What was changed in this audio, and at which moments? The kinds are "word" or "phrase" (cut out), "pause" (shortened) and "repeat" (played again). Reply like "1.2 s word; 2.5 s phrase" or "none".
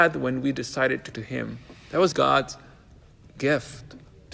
1.1 s word; 2.1 s word